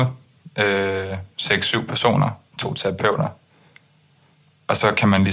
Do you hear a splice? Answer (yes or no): yes